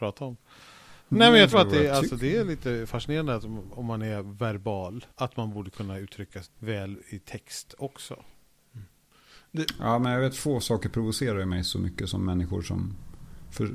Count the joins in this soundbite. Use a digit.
4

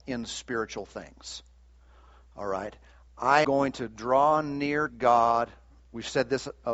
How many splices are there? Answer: 2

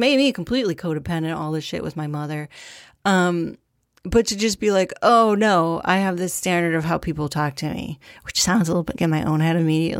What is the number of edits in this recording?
1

